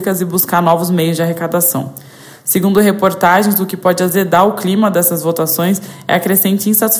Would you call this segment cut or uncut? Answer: uncut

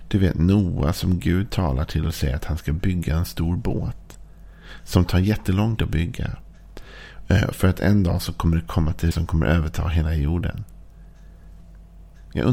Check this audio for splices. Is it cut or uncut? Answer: cut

